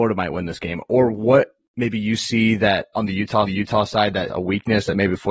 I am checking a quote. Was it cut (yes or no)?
yes